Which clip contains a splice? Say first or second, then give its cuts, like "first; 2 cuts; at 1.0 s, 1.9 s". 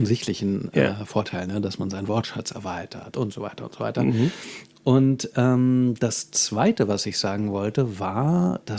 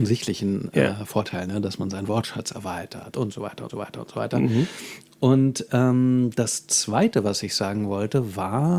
second; 1 cut; at 3.7 s